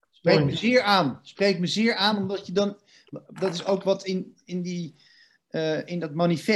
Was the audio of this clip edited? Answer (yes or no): no